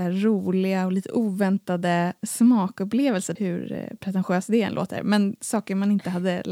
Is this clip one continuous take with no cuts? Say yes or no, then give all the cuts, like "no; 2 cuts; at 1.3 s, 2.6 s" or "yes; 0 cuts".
no; 1 cut; at 3.4 s